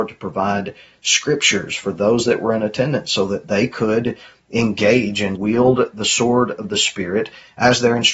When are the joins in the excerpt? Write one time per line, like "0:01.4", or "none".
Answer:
0:05.4